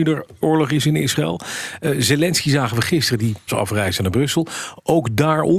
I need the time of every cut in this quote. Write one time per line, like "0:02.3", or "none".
0:03.5

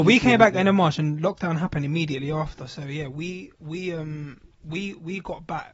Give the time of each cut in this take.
0:03.6
0:04.5

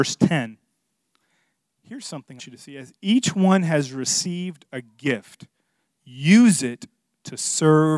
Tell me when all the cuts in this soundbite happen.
0:02.4

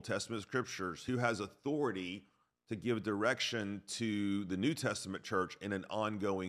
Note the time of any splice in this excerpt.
none

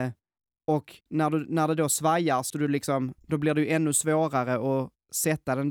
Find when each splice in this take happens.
0:01.0
0:02.5

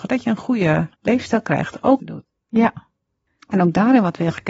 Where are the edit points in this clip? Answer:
0:00.9
0:02.0

